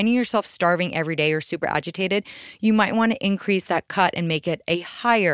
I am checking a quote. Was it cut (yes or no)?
no